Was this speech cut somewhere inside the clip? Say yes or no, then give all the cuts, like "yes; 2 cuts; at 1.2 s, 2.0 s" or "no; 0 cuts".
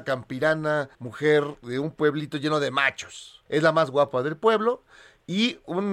yes; 2 cuts; at 0.9 s, 3.5 s